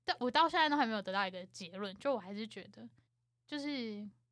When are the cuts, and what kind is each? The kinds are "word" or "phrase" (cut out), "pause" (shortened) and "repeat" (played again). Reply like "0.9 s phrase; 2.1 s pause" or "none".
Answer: 3.1 s pause